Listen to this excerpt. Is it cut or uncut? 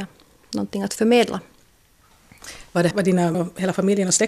cut